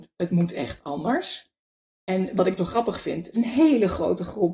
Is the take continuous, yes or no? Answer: no